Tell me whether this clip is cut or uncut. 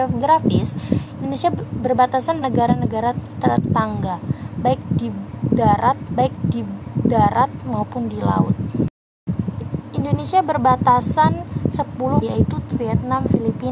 cut